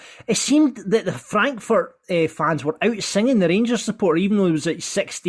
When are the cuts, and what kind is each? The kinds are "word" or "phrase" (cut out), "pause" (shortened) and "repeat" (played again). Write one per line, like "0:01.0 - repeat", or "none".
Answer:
none